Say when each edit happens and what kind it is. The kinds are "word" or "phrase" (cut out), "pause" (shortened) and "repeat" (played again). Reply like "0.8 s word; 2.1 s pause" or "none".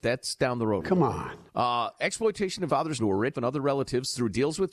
1.5 s pause; 2.7 s word; 3.0 s word; 3.3 s word